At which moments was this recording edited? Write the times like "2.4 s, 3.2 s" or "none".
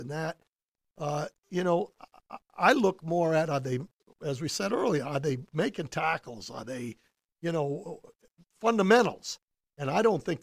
none

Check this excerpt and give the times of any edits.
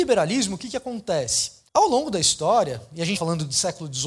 1.7 s, 3.1 s

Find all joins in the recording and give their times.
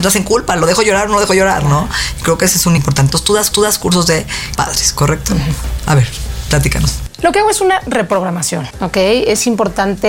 2.8 s, 3.5 s, 4.6 s

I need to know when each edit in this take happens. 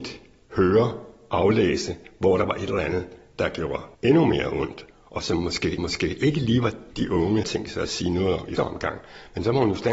3.9 s, 5.8 s, 6.9 s, 7.4 s, 8.6 s

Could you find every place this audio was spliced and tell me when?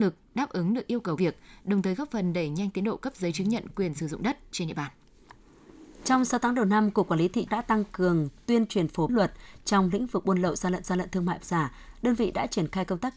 1.2 s, 7.5 s, 9.1 s, 10.8 s, 11.4 s

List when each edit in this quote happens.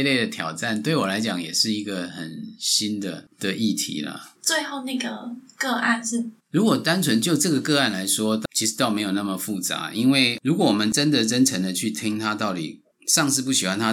4.3 s, 6.4 s

